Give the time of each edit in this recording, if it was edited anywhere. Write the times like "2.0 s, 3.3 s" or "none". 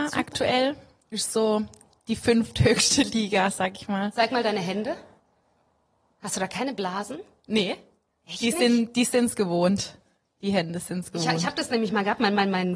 none